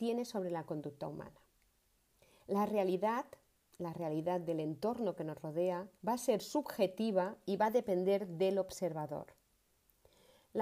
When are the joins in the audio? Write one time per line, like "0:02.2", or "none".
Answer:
0:06.0